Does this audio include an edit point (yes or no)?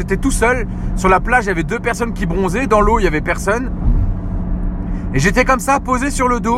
no